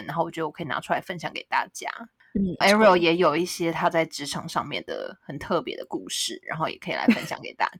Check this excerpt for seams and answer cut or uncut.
cut